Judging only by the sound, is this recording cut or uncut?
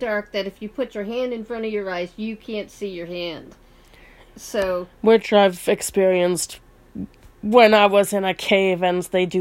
uncut